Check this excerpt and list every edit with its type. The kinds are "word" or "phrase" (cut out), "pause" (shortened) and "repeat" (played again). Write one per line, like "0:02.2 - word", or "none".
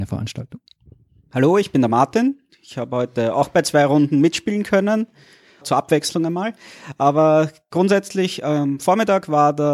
none